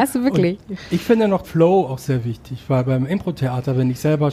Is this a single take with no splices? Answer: no; 1 cut; at 1.4 s

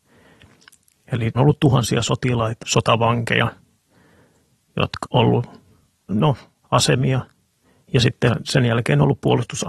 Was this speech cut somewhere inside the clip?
yes; 5 cuts; at 1.4 s, 2.6 s, 5.0 s, 6.1 s, 6.6 s

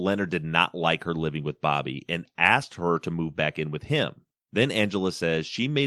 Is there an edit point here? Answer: yes; 1 cut; at 4.3 s

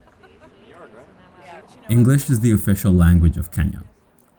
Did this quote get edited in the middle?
yes; 1 cut; at 1.6 s

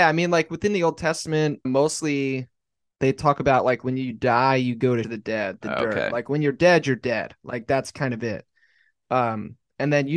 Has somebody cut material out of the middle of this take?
yes; 2 cuts; at 1.6 s, 5.0 s

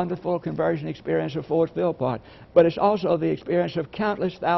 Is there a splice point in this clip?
no; 0 cuts

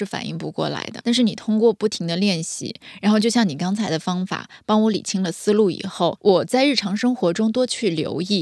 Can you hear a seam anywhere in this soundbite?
yes; 2 cuts; at 1.0 s, 6.2 s

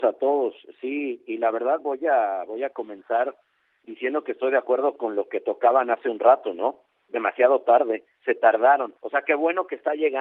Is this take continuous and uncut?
no; 1 cut; at 9.0 s

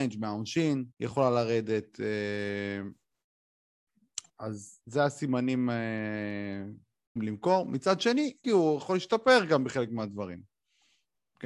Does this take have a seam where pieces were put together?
yes; 4 cuts; at 0.9 s, 4.3 s, 7.2 s, 8.4 s

